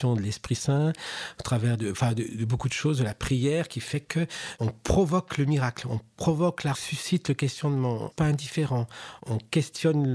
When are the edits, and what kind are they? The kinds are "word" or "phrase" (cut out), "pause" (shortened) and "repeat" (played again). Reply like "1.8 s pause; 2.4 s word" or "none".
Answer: 6.7 s phrase; 8.1 s phrase